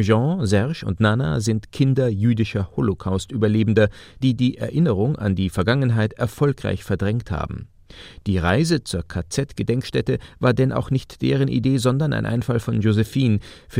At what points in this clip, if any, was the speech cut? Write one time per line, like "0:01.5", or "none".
none

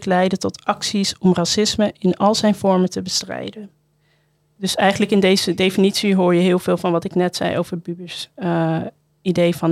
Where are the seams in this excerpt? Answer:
none

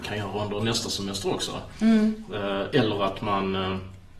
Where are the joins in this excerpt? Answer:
none

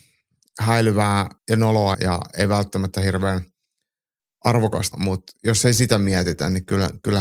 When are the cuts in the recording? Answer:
0:01.4
0:01.9
0:04.9

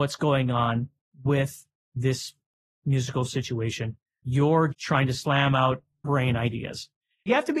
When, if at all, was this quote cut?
0:04.7
0:06.0

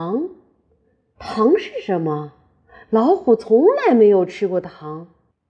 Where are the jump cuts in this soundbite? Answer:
none

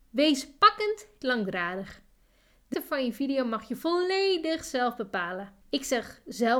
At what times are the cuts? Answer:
0:01.2
0:02.7
0:05.6

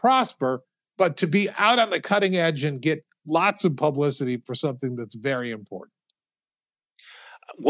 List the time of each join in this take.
none

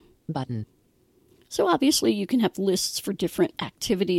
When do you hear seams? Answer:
none

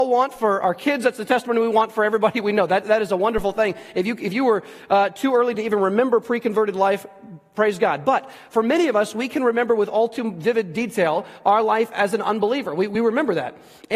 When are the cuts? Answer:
none

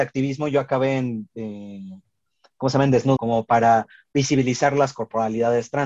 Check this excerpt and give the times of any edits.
0:03.2

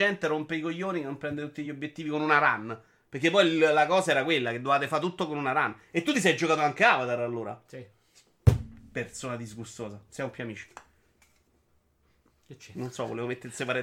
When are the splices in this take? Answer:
none

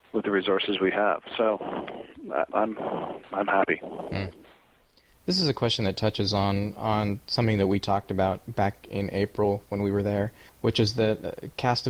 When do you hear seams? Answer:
0:02.5
0:10.5

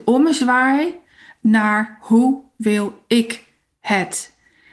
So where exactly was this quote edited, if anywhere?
none

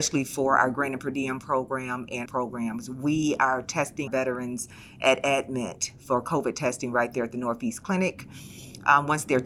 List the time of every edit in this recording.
0:02.2
0:04.1

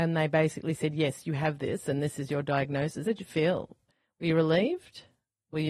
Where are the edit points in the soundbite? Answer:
0:03.1

